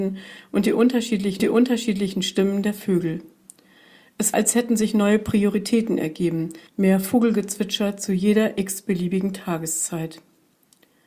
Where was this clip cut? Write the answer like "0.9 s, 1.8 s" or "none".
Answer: 1.4 s, 4.3 s, 6.7 s